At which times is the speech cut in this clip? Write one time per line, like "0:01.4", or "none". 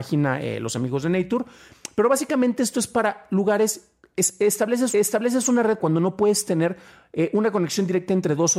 0:04.9
0:05.8